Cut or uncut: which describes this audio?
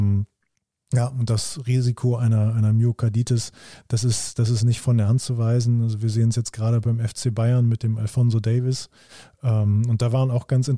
uncut